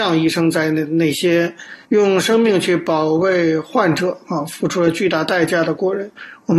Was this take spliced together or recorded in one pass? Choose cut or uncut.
cut